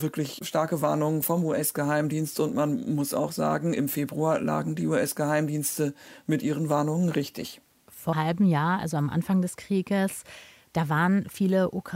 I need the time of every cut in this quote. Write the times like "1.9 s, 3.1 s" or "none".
8.1 s